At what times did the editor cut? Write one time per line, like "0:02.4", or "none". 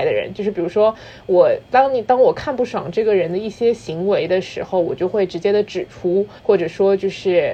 0:01.6
0:06.4

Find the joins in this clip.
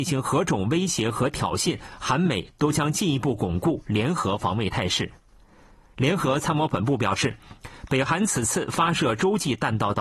none

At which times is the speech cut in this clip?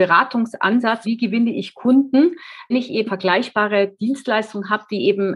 0:01.0
0:02.7
0:03.1

